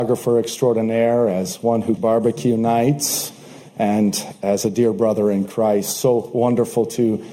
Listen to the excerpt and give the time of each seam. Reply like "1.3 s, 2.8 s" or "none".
2.0 s